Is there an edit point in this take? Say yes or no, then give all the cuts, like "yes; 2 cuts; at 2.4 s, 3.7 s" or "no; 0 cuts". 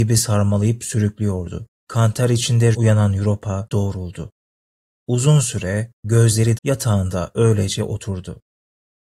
yes; 4 cuts; at 1.8 s, 2.7 s, 3.7 s, 6.6 s